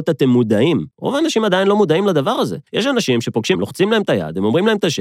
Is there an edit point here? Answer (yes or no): yes